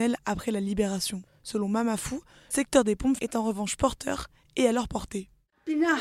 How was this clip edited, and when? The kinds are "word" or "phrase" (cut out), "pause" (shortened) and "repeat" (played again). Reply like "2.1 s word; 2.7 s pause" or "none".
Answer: 2.5 s word; 3.2 s word